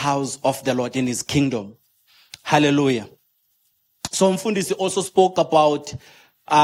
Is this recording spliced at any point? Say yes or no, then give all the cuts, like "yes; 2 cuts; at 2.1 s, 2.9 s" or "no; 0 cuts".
no; 0 cuts